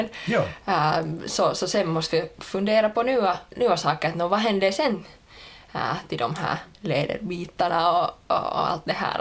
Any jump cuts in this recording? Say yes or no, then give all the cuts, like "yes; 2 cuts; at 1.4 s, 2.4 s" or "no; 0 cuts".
yes; 1 cut; at 6.7 s